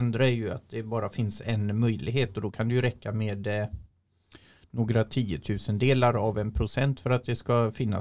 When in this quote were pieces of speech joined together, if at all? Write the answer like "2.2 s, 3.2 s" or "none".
none